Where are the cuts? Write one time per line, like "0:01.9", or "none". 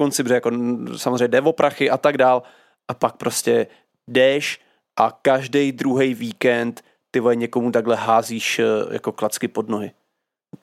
none